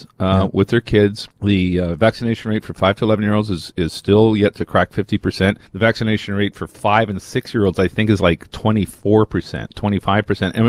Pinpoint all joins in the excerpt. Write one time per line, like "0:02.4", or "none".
0:01.3
0:05.7